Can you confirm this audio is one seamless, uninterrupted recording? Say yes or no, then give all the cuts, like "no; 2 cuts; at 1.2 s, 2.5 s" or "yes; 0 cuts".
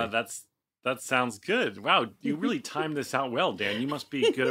yes; 0 cuts